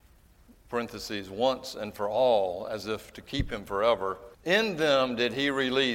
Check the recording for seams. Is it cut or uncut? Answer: cut